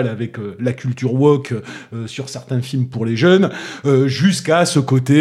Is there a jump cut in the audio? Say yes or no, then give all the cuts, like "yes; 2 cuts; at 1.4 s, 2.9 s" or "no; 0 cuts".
no; 0 cuts